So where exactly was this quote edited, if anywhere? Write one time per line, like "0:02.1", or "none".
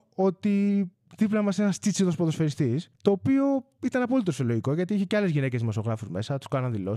0:00.9
0:02.9